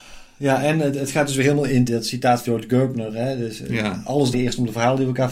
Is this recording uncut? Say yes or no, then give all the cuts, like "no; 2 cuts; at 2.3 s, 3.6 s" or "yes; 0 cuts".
no; 3 cuts; at 1.9 s, 2.4 s, 4.3 s